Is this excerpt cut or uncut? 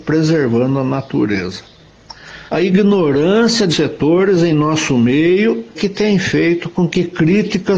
cut